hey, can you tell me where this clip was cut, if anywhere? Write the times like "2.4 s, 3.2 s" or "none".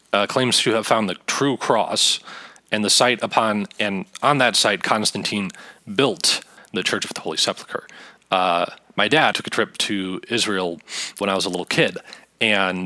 6.6 s, 9.3 s, 11.2 s

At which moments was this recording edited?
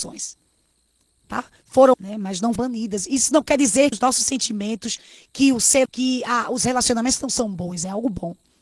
1.9 s, 2.6 s, 3.9 s, 5.9 s

